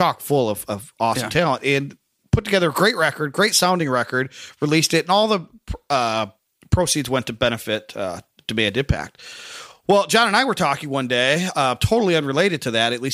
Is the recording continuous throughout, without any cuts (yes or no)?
yes